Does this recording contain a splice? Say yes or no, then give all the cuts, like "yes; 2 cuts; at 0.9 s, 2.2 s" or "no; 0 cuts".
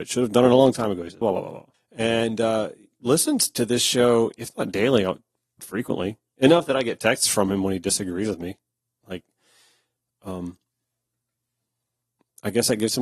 yes; 3 cuts; at 1.2 s, 1.7 s, 5.6 s